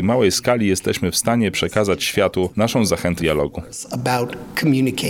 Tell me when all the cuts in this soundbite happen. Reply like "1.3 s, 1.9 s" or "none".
3.2 s